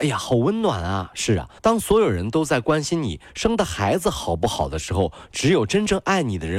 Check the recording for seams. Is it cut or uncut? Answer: cut